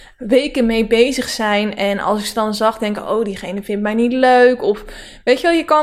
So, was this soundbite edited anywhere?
no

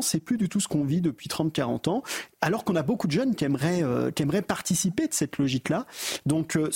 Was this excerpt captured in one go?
yes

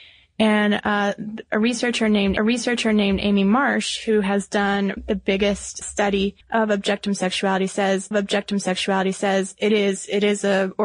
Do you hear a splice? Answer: yes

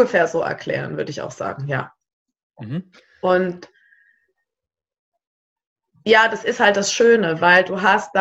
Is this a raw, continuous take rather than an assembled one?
yes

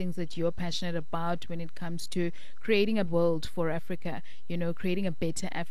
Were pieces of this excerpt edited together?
yes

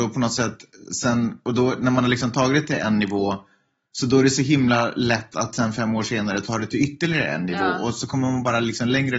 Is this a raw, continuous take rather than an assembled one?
yes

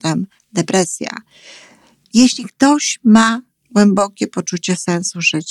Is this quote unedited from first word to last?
yes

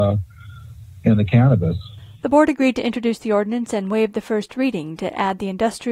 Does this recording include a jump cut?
no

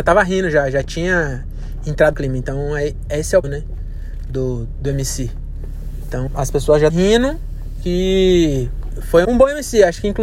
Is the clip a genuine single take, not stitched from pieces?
no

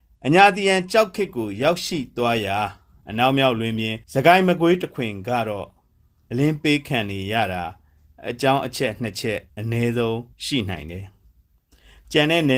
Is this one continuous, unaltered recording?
no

